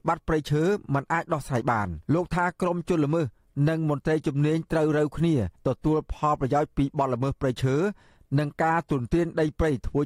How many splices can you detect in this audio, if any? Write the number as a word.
two